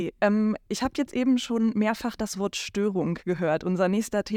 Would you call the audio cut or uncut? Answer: uncut